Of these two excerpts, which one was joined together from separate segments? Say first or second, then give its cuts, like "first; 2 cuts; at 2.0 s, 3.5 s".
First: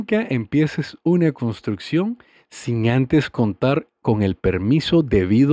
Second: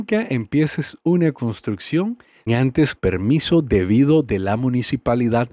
second; 2 cuts; at 2.5 s, 3.0 s